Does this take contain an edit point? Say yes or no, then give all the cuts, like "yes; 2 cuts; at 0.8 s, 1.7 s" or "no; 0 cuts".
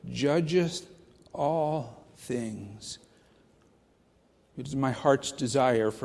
no; 0 cuts